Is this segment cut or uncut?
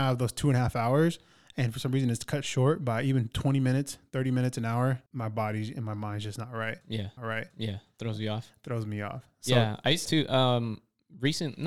cut